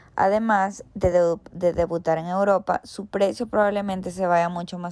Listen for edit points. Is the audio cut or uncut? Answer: uncut